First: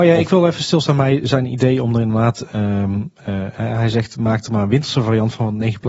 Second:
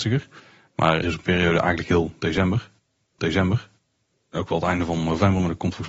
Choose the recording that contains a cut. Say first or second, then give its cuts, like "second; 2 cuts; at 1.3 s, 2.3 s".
second; 2 cuts; at 1.0 s, 3.2 s